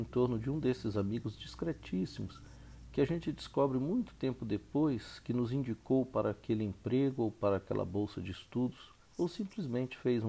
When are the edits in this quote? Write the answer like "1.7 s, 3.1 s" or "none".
9.0 s